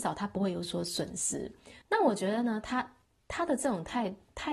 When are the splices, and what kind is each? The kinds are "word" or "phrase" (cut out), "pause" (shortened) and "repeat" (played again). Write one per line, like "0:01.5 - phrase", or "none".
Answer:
0:01.8 - pause